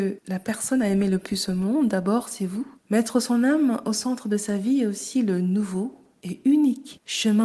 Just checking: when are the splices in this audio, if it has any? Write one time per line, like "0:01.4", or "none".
0:02.8